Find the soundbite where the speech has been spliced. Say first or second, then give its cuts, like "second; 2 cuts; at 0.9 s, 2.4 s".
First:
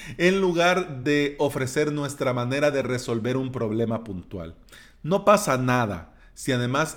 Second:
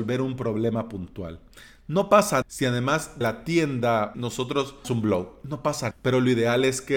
second; 5 cuts; at 2.4 s, 3.2 s, 4.1 s, 4.8 s, 5.9 s